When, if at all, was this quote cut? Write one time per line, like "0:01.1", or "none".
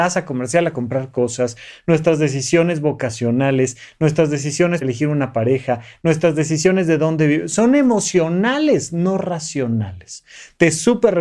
0:04.8